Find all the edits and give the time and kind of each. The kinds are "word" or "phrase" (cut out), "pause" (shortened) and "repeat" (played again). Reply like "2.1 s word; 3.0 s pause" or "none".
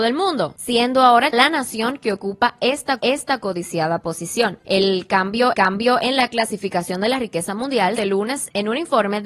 1.3 s word; 3.0 s repeat; 5.5 s repeat; 8.0 s phrase